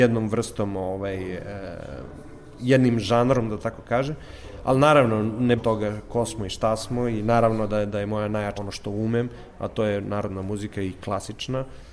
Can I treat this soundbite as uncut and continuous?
no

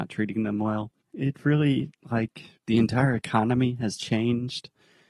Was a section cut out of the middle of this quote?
yes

